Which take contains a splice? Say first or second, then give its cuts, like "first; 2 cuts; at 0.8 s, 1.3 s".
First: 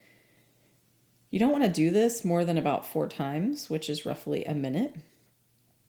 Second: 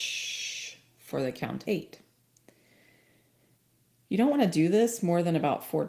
second; 1 cut; at 1.6 s